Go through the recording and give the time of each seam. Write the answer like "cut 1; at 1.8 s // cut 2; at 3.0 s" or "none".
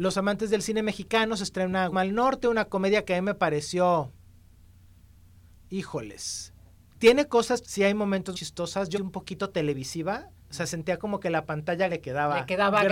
cut 1; at 1.9 s // cut 2; at 6.7 s // cut 3; at 7.6 s // cut 4; at 8.3 s // cut 5; at 8.9 s // cut 6; at 10.4 s // cut 7; at 11.9 s